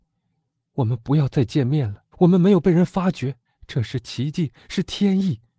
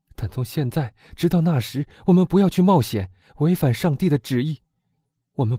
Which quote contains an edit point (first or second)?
first